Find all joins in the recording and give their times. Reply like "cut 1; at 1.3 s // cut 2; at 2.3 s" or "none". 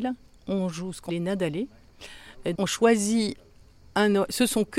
cut 1; at 1.1 s // cut 2; at 2.5 s